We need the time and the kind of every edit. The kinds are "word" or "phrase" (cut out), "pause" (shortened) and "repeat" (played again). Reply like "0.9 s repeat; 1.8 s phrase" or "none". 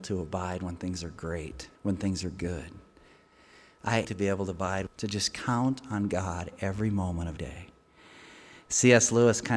1.7 s pause; 4.0 s word; 4.9 s phrase; 7.4 s word